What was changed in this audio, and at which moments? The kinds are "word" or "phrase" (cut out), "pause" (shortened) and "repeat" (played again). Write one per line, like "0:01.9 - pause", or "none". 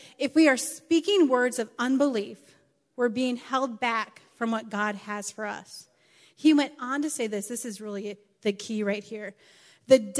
none